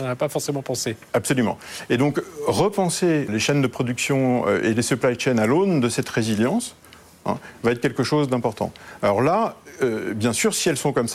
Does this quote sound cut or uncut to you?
cut